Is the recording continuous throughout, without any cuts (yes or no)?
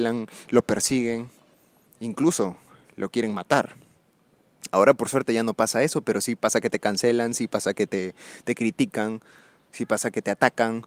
yes